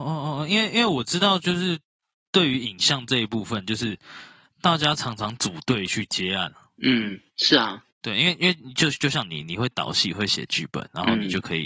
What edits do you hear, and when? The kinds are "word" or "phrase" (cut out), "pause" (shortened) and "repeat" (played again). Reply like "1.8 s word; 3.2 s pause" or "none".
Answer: none